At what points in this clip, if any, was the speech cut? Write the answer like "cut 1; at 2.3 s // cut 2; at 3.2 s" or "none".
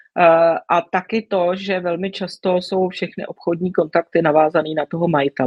none